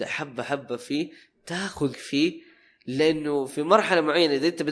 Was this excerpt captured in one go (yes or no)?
no